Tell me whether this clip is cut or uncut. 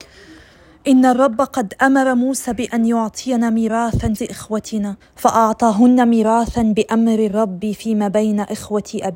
cut